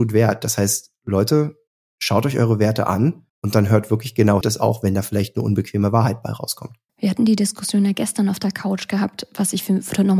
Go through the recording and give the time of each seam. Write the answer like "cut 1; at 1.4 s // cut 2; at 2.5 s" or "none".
cut 1; at 1.7 s // cut 2; at 3.3 s // cut 3; at 4.4 s // cut 4; at 6.9 s